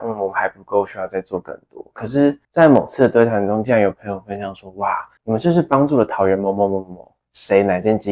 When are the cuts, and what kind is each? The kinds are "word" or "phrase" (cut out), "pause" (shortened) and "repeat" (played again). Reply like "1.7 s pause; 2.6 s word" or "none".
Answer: 2.4 s pause; 5.2 s pause